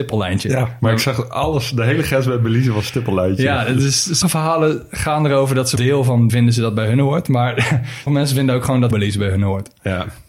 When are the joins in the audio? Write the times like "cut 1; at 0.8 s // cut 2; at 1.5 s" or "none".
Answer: cut 1; at 4.2 s // cut 2; at 5.8 s // cut 3; at 6.3 s // cut 4; at 8.1 s // cut 5; at 8.9 s